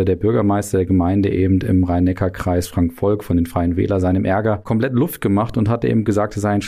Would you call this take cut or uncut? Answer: uncut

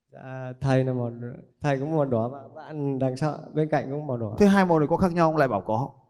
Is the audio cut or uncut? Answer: cut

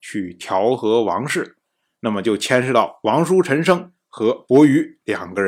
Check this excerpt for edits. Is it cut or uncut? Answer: uncut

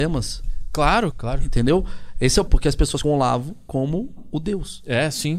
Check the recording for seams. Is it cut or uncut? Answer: cut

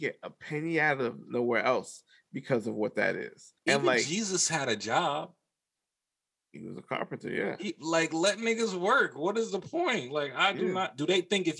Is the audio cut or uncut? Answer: cut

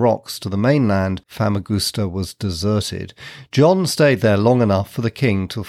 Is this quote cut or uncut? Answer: cut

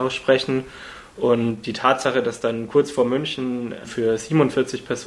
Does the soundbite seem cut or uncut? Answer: uncut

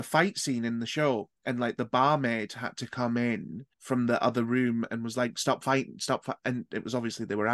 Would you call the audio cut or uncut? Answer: cut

